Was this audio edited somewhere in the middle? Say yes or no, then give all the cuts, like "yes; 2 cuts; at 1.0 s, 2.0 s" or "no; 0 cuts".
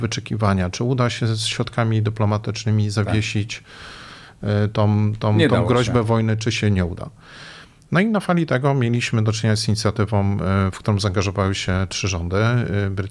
no; 0 cuts